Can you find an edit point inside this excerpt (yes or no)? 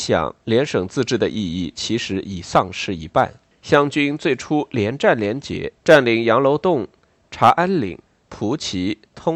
yes